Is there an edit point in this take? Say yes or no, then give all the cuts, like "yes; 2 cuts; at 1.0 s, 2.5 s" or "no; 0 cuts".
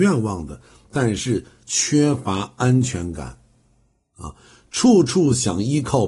no; 0 cuts